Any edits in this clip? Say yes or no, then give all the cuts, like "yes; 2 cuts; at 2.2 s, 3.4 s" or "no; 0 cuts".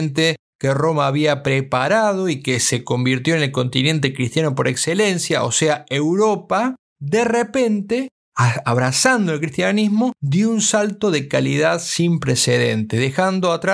yes; 1 cut; at 10.1 s